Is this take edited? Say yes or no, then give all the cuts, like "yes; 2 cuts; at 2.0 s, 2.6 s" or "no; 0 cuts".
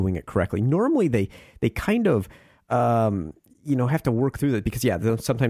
no; 0 cuts